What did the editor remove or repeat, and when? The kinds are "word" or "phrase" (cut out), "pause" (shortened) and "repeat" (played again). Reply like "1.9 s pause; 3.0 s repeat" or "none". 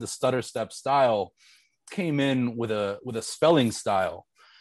1.9 s word